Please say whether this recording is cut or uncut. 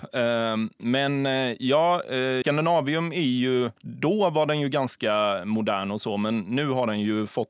cut